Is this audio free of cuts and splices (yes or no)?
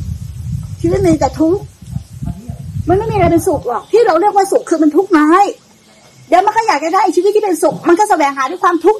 yes